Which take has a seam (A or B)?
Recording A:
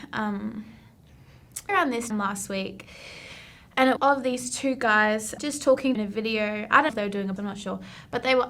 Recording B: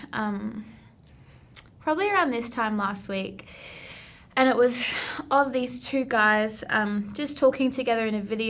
A